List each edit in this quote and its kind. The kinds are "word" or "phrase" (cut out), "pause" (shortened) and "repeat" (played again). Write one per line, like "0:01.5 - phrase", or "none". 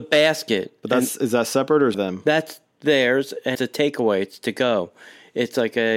0:01.9 - phrase
0:03.5 - word